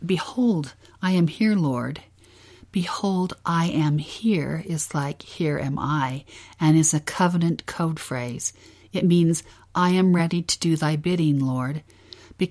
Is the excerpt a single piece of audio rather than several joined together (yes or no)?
yes